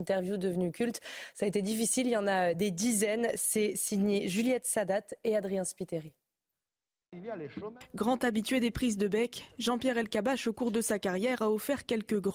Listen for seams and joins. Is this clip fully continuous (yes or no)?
yes